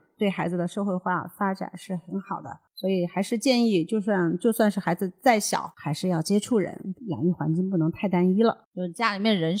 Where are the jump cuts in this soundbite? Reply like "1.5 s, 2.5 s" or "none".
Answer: 2.7 s, 8.6 s